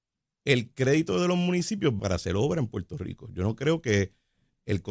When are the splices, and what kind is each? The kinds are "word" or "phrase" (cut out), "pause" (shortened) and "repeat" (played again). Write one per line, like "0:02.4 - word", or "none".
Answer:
0:02.0 - phrase